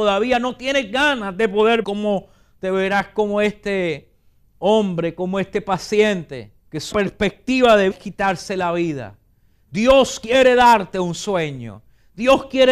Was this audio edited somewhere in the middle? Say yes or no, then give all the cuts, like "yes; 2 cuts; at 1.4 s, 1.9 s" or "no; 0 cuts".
yes; 4 cuts; at 1.8 s, 6.6 s, 6.9 s, 7.9 s